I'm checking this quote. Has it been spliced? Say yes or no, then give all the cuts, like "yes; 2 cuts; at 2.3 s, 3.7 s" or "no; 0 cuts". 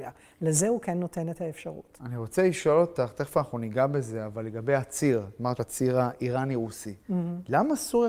yes; 1 cut; at 5.6 s